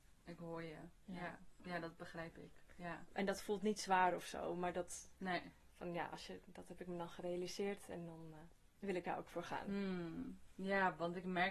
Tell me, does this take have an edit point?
no; 0 cuts

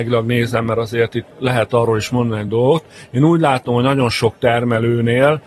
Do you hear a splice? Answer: no; 0 cuts

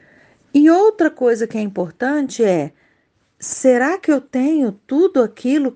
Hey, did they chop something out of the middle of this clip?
no; 0 cuts

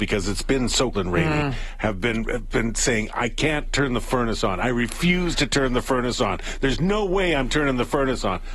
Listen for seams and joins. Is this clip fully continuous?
no; 1 cut; at 0.9 s

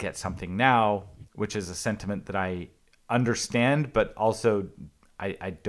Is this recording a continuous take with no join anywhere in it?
yes; 0 cuts

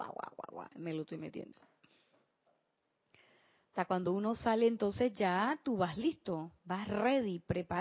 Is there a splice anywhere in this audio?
no; 0 cuts

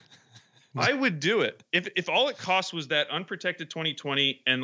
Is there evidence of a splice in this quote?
no; 0 cuts

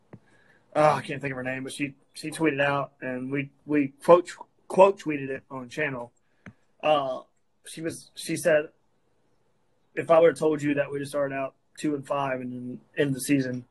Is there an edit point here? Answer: no; 0 cuts

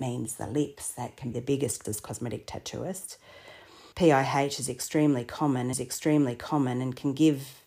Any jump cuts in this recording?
yes; 4 cuts; at 1.3 s, 1.8 s, 3.9 s, 5.7 s

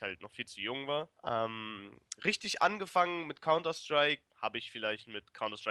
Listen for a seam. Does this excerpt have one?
yes; 2 cuts; at 1.2 s, 4.3 s

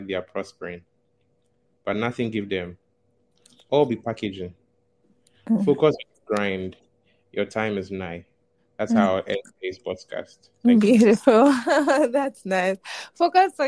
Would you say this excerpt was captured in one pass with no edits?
yes; 0 cuts

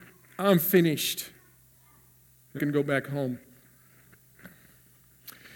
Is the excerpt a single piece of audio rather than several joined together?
no; 1 cut; at 2.6 s

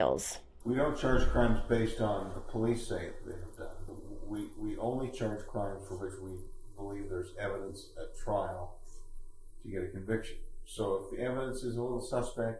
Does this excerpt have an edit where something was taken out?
yes; 1 cut; at 2.3 s

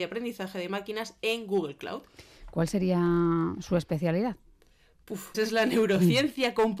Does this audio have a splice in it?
yes; 1 cut; at 5.3 s

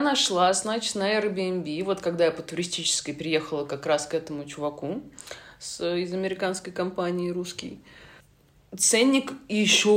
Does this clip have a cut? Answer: no; 0 cuts

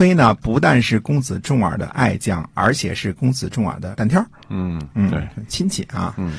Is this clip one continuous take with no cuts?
no; 1 cut; at 3.9 s

